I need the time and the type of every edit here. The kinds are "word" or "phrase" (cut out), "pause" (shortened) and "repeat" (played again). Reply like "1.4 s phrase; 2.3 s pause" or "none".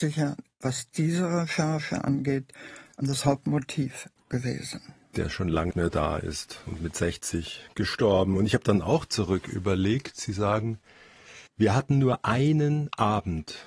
5.0 s pause; 5.7 s word; 11.5 s pause